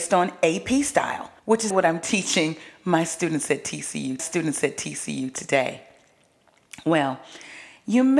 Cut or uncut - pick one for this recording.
cut